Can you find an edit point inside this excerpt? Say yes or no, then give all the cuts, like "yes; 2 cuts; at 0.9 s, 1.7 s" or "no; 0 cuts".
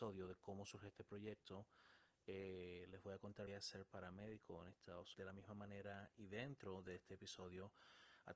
yes; 2 cuts; at 3.5 s, 5.1 s